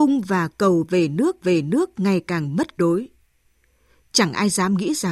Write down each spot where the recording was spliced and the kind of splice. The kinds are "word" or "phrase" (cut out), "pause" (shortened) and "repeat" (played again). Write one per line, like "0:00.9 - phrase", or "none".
0:01.4 - repeat
0:02.8 - word